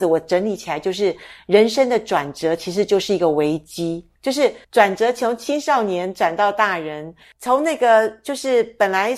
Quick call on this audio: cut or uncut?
cut